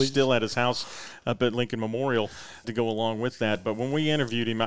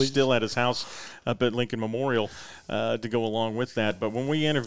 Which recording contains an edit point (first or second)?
first